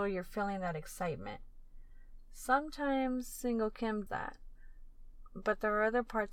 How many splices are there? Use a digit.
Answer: 1